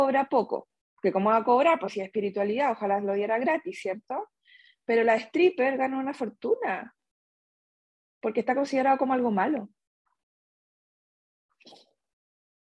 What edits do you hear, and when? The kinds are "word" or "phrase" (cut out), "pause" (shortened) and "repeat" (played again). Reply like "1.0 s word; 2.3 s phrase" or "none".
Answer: none